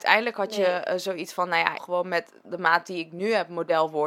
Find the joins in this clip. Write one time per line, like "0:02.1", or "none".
0:01.8
0:02.4